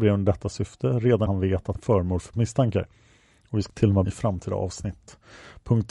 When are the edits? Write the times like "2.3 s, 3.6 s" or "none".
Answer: 1.3 s, 1.8 s, 2.3 s, 3.7 s, 4.0 s